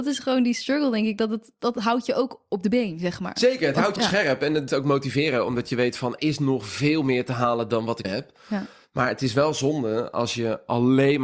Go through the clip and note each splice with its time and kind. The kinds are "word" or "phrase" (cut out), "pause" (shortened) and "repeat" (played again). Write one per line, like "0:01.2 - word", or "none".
0:01.6 - word
0:04.0 - word
0:04.7 - word
0:06.2 - word
0:08.0 - word